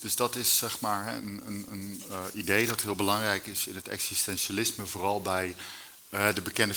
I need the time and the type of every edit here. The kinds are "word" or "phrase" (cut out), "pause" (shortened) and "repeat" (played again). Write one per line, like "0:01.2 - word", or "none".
none